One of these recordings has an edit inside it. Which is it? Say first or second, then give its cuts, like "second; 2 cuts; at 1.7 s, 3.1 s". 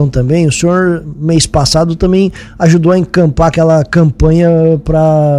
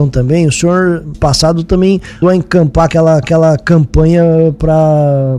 second; 3 cuts; at 1.1 s, 2.2 s, 3.2 s